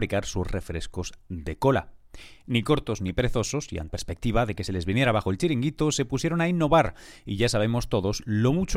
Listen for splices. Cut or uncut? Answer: cut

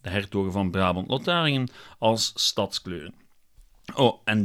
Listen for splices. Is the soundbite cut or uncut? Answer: uncut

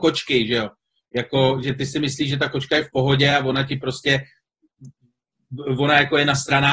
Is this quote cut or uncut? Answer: uncut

